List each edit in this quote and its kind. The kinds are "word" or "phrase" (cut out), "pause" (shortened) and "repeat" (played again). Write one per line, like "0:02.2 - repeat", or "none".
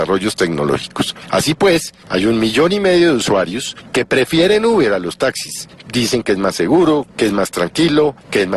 none